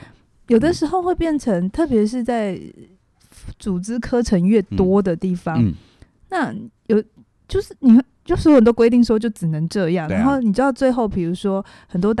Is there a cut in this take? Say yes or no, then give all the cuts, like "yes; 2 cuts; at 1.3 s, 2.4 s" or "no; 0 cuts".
no; 0 cuts